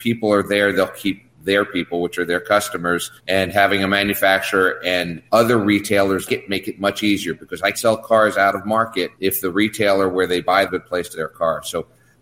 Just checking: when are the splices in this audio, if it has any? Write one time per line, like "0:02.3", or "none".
0:03.2
0:05.3
0:06.3
0:07.7
0:09.1
0:10.7
0:11.1